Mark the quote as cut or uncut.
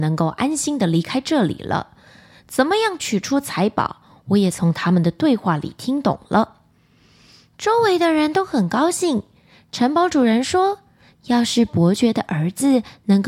uncut